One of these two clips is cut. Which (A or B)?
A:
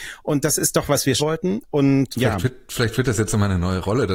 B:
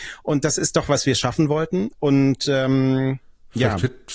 A